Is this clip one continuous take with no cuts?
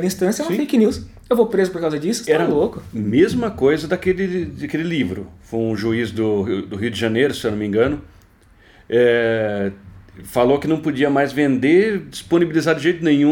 yes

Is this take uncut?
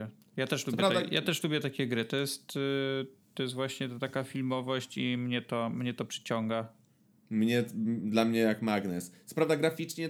yes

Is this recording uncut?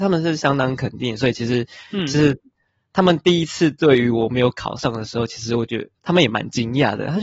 yes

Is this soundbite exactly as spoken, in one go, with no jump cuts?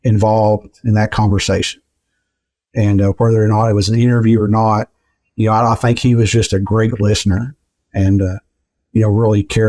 yes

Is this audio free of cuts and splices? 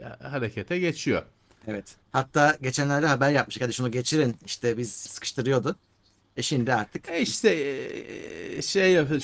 no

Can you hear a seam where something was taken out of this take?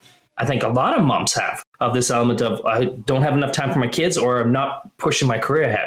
no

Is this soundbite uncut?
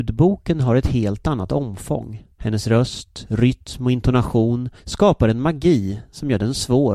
no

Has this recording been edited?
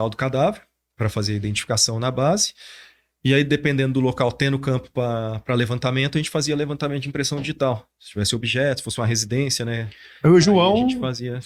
no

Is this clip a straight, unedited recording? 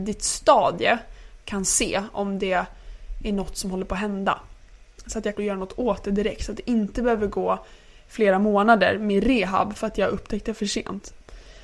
no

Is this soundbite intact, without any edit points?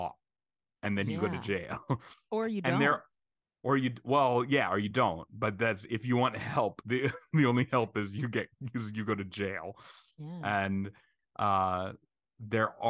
yes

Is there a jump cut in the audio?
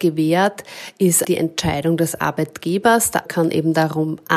yes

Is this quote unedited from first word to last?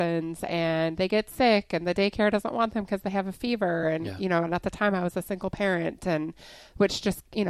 yes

